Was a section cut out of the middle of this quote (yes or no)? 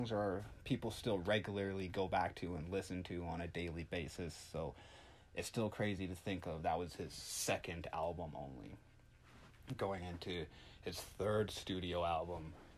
no